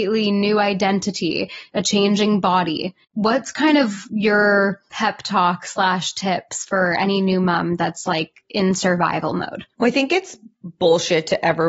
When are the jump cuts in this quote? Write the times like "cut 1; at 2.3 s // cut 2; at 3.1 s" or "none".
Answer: cut 1; at 3.0 s